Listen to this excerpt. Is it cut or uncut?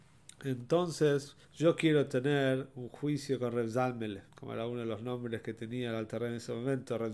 cut